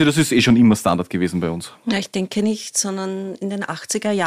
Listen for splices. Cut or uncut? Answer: uncut